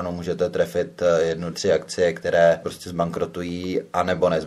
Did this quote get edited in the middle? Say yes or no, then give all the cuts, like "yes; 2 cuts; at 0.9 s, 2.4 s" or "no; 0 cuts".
yes; 2 cuts; at 1.5 s, 2.6 s